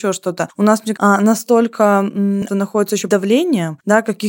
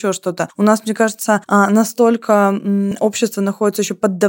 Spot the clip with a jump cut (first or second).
first